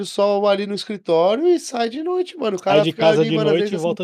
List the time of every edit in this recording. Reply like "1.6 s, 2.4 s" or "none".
none